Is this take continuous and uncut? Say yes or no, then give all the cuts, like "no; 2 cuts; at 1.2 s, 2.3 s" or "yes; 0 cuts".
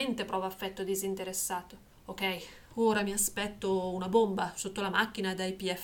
no; 1 cut; at 1.9 s